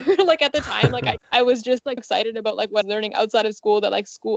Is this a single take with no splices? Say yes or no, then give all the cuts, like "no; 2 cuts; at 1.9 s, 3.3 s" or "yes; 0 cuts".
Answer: no; 3 cuts; at 1.2 s, 2.0 s, 2.8 s